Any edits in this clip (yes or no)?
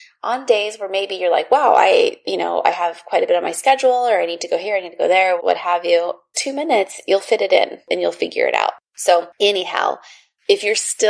yes